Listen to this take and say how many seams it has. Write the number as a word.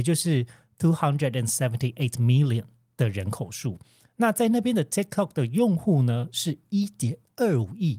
zero